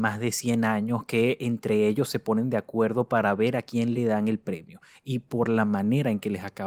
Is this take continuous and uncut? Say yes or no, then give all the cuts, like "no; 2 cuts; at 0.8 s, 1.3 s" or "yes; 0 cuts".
yes; 0 cuts